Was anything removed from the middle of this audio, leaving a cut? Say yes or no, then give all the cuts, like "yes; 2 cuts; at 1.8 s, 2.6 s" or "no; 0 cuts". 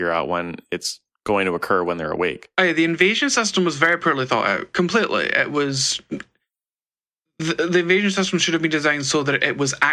no; 0 cuts